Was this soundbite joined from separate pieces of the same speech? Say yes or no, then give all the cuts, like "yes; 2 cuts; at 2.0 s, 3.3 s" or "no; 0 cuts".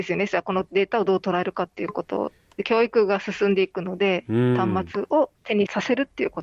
no; 0 cuts